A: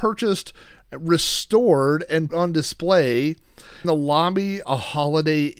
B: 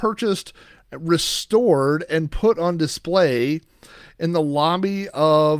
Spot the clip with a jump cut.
A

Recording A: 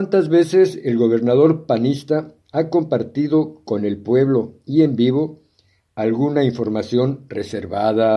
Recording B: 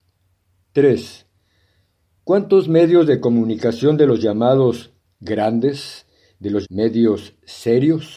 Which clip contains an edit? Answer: B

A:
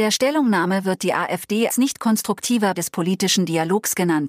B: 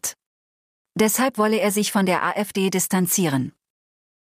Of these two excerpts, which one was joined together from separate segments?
A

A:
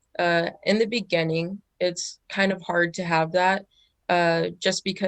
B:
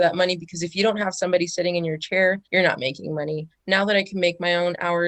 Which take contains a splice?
B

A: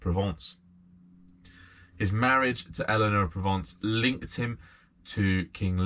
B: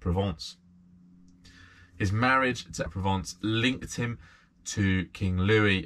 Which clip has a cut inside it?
B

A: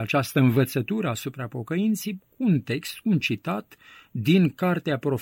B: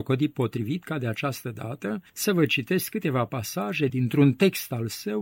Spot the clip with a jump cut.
B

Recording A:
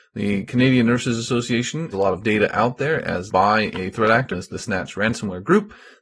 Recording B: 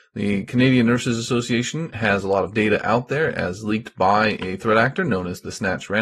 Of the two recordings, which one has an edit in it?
A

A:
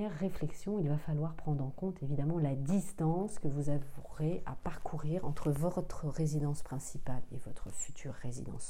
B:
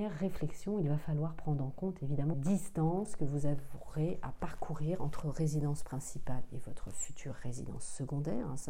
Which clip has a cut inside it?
B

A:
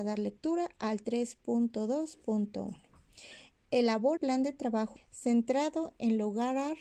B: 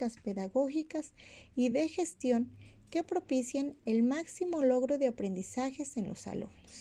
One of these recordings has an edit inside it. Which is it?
A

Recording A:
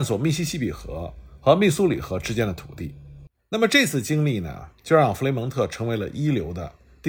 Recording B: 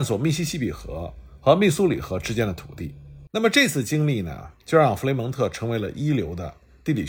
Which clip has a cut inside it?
B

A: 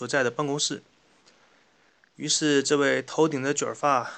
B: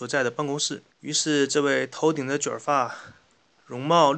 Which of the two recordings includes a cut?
B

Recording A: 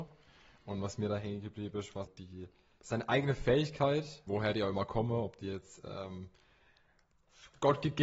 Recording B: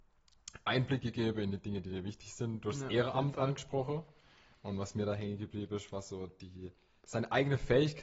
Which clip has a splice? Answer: A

